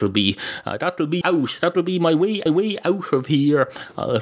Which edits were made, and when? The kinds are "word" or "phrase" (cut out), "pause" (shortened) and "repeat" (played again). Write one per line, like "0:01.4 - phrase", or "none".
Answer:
0:01.2 - word
0:02.5 - repeat